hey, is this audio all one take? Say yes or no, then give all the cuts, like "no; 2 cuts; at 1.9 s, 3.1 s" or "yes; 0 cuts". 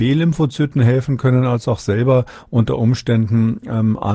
yes; 0 cuts